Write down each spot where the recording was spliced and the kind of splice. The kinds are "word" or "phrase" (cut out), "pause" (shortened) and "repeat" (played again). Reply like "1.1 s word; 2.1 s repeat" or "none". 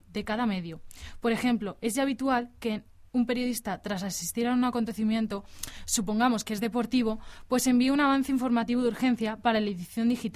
none